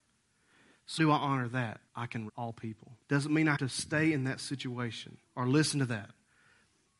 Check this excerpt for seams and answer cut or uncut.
cut